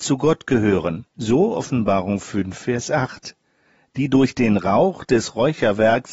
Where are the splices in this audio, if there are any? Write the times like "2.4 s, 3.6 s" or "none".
1.1 s